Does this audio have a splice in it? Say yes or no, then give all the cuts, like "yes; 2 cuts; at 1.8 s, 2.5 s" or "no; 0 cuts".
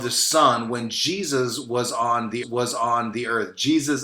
yes; 1 cut; at 2.4 s